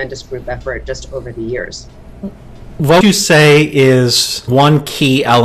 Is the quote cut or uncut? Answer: cut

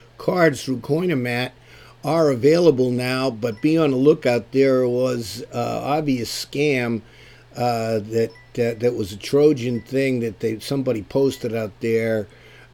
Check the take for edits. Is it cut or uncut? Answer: uncut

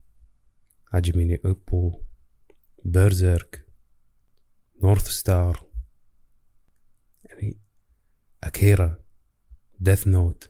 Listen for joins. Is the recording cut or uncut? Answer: uncut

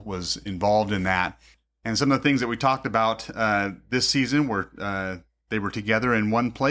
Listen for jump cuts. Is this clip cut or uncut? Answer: uncut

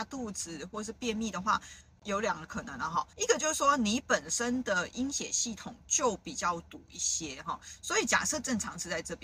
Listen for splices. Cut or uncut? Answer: cut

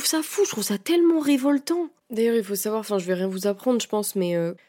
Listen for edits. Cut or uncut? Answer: cut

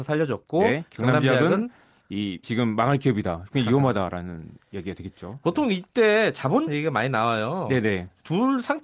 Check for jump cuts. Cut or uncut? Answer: cut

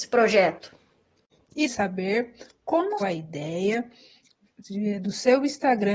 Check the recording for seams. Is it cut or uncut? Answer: cut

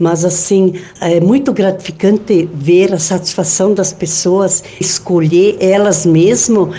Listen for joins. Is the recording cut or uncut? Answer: cut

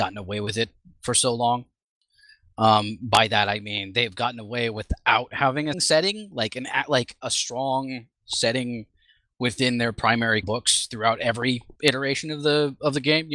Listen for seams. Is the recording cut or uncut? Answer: cut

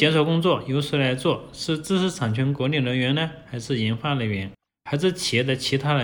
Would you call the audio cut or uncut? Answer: uncut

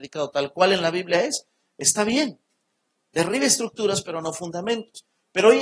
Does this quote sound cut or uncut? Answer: uncut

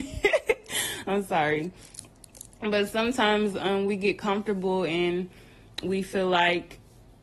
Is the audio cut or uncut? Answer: uncut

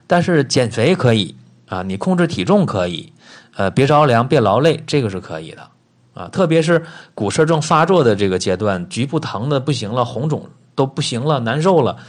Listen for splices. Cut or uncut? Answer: uncut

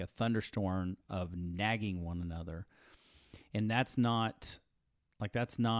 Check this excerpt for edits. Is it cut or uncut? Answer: uncut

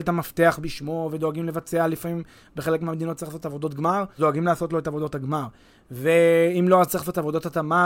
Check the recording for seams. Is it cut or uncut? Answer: cut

